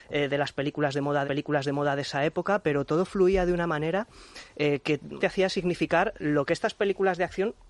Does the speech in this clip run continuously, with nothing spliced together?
no; 2 cuts; at 1.2 s, 5.2 s

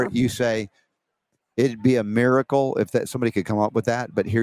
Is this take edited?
no; 0 cuts

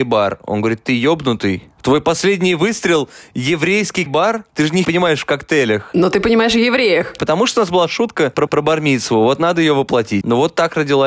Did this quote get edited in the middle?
yes; 5 cuts; at 1.8 s, 4.1 s, 4.5 s, 4.8 s, 8.5 s

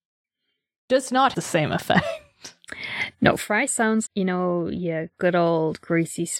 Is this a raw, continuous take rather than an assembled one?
no; 3 cuts; at 1.3 s, 3.7 s, 4.1 s

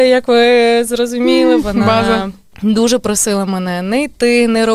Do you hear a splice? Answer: yes; 1 cut; at 2.5 s

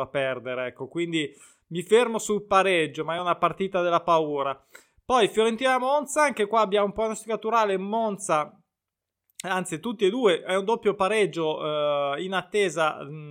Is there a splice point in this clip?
no; 0 cuts

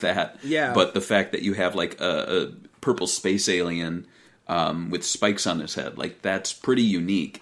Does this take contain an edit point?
no; 0 cuts

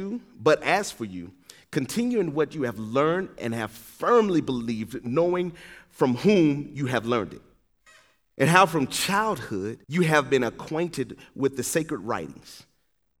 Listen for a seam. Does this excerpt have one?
yes; 1 cut; at 9.8 s

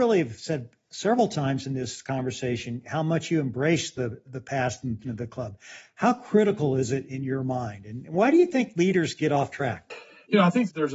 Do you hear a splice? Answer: yes; 3 cuts; at 4.2 s, 5.0 s, 7.1 s

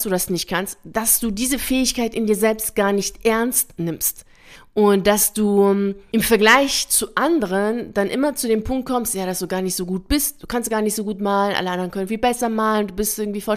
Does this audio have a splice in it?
no; 0 cuts

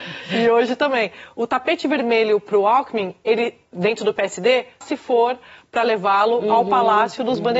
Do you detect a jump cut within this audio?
yes; 1 cut; at 4.8 s

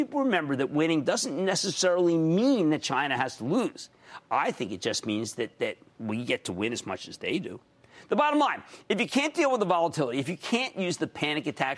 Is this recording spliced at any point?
no; 0 cuts

